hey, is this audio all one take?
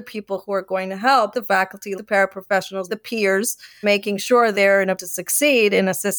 no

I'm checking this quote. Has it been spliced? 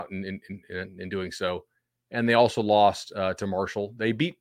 no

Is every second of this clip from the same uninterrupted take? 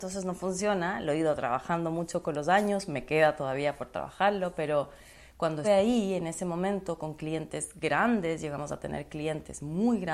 no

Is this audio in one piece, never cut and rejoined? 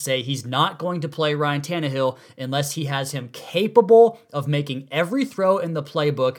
yes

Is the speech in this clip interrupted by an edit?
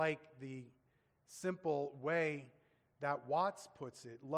no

